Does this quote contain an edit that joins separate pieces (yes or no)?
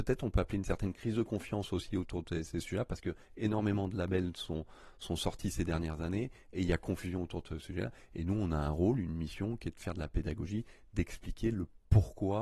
no